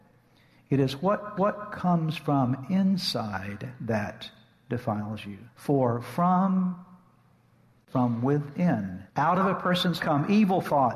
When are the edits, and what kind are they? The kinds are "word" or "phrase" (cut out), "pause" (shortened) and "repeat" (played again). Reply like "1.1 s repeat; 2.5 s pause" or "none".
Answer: 1.4 s repeat; 5.5 s pause; 9.1 s pause; 10.0 s word